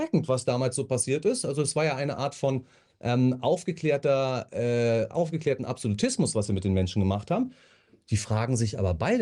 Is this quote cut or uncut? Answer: uncut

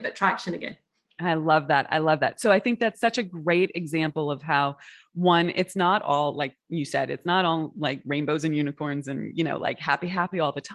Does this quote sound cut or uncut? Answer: uncut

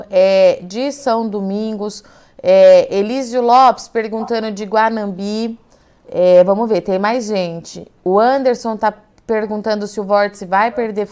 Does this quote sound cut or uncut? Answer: uncut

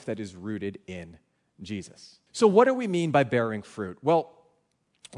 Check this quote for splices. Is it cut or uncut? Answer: cut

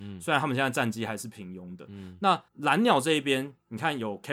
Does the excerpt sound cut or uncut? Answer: cut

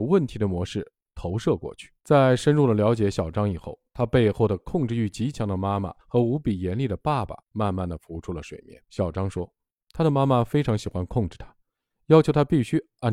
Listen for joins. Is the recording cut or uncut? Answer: cut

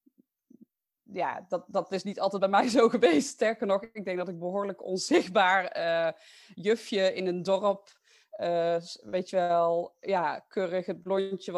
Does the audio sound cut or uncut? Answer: uncut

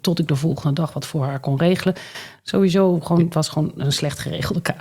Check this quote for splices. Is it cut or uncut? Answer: uncut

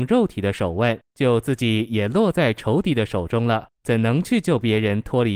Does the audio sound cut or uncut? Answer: cut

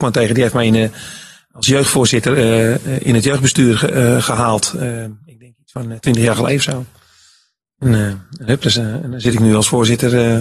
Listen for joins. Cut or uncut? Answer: uncut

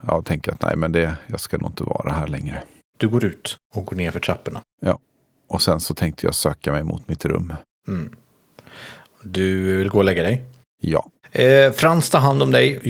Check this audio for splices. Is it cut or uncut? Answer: uncut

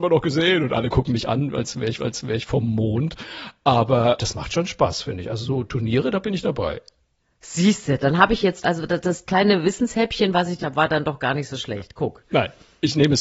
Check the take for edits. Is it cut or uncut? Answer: cut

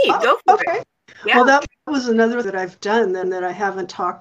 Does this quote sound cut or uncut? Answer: cut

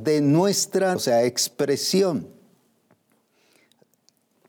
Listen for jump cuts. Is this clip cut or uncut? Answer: cut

